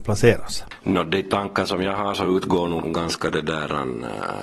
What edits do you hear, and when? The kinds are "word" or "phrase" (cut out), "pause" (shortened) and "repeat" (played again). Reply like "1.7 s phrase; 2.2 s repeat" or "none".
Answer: 2.8 s word